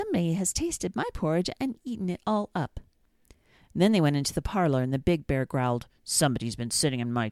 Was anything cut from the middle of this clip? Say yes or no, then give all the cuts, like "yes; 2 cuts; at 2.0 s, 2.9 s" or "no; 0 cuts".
no; 0 cuts